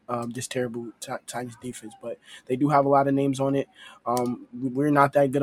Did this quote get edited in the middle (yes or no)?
no